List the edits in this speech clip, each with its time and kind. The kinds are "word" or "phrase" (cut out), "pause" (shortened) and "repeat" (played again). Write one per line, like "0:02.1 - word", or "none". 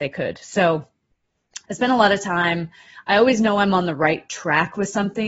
0:01.6 - pause